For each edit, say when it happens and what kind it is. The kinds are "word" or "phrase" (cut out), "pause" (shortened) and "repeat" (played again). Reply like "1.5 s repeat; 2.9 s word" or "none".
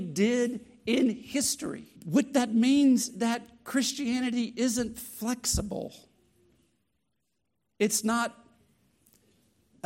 2.0 s pause; 3.1 s word

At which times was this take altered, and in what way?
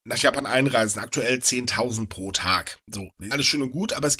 2.8 s pause; 3.3 s word

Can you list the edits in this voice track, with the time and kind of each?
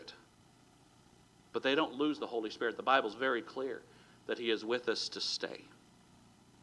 none

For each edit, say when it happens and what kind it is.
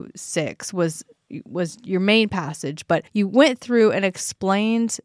3.1 s pause

